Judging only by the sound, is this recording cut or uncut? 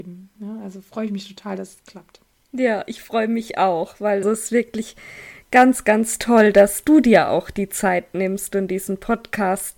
cut